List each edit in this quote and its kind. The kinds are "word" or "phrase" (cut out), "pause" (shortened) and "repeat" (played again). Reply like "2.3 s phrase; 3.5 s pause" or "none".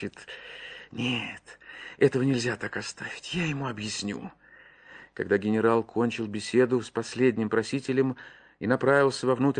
none

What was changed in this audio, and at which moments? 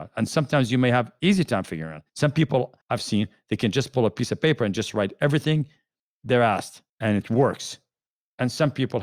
2.1 s pause; 2.8 s pause; 6.9 s pause

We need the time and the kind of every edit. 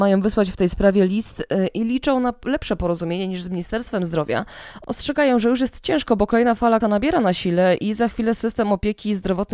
6.8 s word

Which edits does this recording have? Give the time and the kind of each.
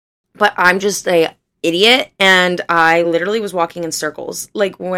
none

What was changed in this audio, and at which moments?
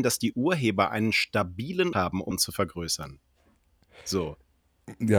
1.9 s word; 2.3 s phrase

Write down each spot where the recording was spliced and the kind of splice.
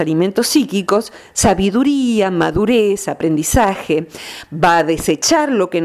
none

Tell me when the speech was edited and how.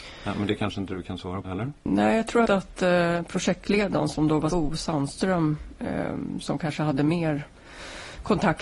1.4 s word; 2.5 s phrase; 4.5 s word

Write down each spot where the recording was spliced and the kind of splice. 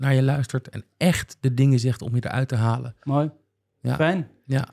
none

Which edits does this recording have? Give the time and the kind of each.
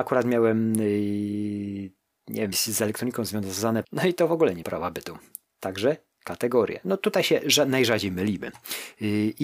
2.5 s word; 3.8 s word; 4.6 s word

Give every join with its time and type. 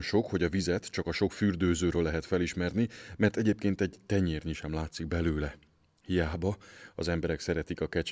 none

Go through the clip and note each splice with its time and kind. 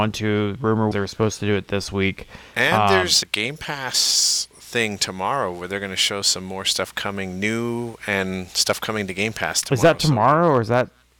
0.9 s word; 3.2 s word

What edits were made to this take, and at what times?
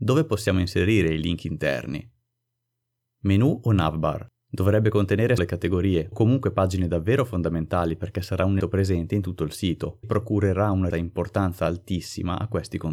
5.4 s word; 6.1 s word; 8.6 s word; 10.0 s word; 10.9 s word

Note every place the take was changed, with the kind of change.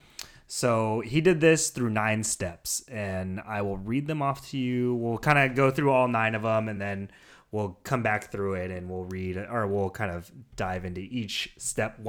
none

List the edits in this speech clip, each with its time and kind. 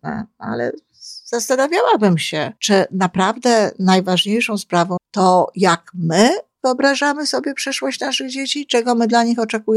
2.6 s pause; 5.0 s phrase

